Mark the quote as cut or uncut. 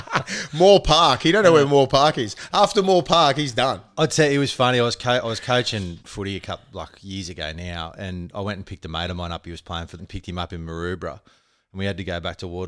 cut